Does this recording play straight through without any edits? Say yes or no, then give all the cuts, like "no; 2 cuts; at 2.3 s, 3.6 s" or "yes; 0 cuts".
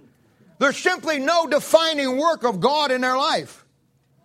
yes; 0 cuts